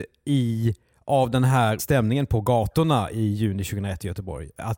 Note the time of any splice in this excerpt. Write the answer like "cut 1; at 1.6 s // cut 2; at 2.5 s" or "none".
cut 1; at 1.8 s